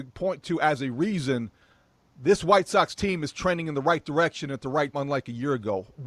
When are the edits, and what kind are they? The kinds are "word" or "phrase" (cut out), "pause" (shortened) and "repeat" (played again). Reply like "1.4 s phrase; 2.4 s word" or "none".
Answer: 4.9 s word